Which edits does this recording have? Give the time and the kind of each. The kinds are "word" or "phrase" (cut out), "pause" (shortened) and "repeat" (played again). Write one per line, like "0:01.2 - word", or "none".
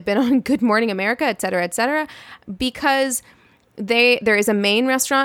none